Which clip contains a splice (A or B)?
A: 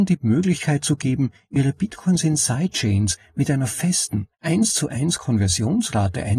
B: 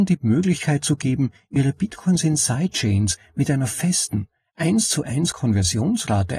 A